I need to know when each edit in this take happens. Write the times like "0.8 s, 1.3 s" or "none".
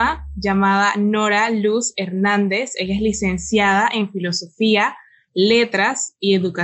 none